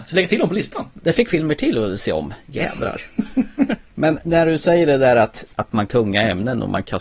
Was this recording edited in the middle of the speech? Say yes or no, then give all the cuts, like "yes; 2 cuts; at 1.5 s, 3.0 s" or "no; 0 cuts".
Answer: yes; 3 cuts; at 1.3 s, 5.5 s, 5.9 s